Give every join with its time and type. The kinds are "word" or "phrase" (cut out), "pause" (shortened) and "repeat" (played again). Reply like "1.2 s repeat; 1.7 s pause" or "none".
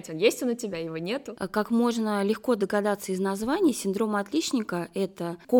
none